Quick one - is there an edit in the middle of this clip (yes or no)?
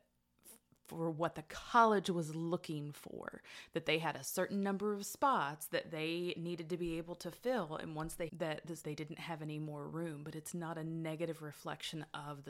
yes